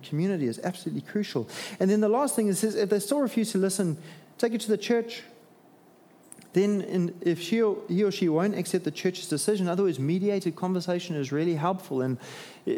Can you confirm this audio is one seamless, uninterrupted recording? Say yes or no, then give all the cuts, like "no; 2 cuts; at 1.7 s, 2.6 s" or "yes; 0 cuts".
yes; 0 cuts